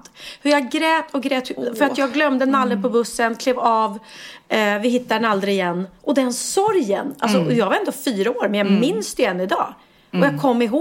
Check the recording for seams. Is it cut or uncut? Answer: uncut